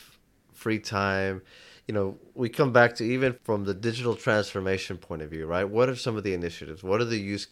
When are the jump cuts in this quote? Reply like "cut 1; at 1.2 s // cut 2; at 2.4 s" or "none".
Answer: cut 1; at 3.3 s